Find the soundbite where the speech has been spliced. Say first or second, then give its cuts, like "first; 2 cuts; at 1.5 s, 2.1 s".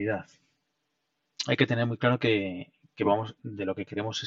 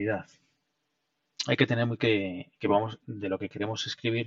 second; 2 cuts; at 2.0 s, 2.5 s